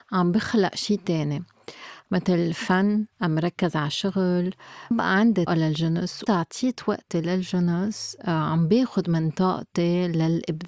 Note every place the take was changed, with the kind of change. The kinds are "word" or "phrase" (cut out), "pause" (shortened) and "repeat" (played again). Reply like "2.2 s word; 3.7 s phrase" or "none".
3.1 s pause; 4.9 s word; 5.5 s word; 6.3 s word